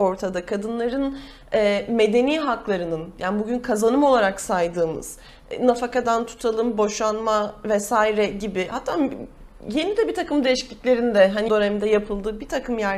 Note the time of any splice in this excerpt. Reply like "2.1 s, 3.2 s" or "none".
11.5 s